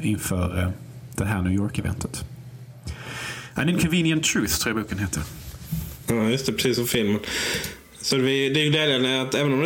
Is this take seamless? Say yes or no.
yes